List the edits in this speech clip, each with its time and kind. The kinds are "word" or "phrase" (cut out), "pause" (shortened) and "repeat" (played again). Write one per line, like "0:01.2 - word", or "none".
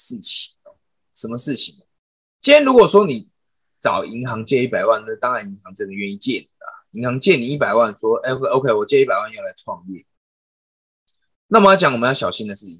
none